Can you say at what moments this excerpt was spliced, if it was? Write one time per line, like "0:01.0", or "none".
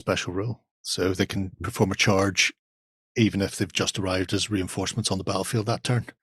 none